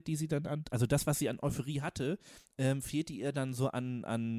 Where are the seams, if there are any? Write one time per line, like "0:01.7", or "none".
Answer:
none